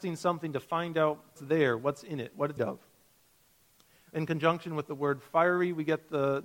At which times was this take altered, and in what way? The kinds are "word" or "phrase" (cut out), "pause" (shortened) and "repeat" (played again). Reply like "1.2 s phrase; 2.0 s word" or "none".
1.4 s word; 2.6 s word